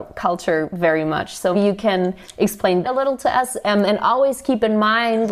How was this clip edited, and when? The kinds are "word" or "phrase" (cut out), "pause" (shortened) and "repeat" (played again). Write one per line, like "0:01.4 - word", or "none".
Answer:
0:01.5 - word
0:02.8 - word